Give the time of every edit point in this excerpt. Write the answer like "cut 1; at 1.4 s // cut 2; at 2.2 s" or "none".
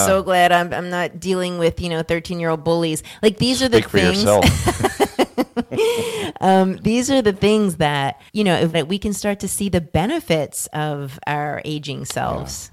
cut 1; at 8.3 s // cut 2; at 8.7 s